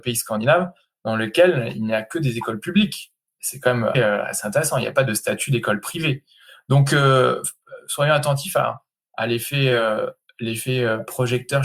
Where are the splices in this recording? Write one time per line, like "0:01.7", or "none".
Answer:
0:03.9